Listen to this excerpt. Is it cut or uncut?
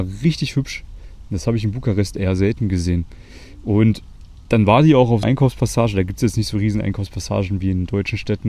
cut